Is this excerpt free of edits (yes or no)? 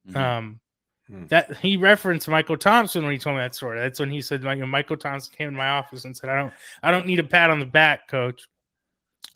yes